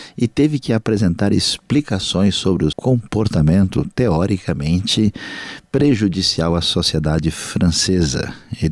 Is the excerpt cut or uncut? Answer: cut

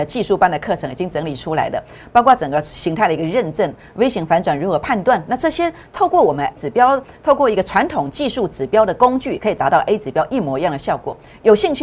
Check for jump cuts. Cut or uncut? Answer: cut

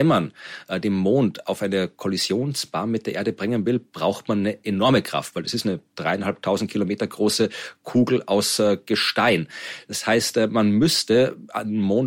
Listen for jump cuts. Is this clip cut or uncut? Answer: uncut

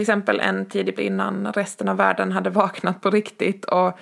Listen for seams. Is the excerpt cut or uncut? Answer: cut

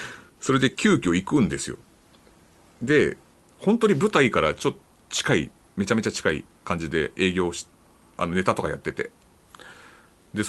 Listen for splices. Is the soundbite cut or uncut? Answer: uncut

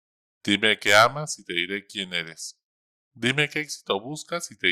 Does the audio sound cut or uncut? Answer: uncut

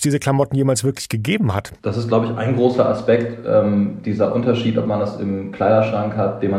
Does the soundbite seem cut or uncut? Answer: cut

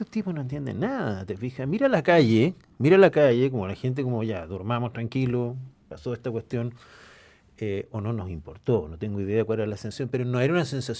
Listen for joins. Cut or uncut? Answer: uncut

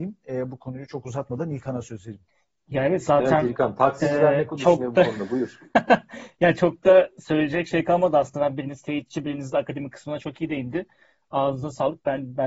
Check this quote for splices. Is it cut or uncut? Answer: uncut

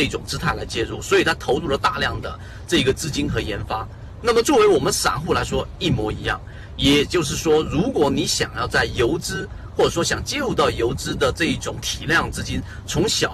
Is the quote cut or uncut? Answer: uncut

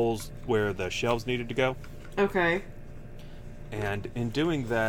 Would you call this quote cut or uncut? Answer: uncut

